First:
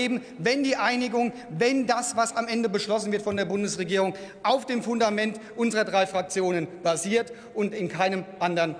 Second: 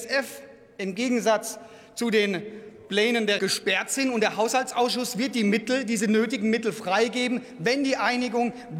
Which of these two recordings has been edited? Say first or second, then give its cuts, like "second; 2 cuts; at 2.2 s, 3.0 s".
second; 1 cut; at 3.4 s